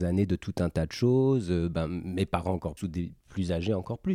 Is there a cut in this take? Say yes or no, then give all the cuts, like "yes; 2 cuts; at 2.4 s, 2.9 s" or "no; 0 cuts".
yes; 1 cut; at 2.8 s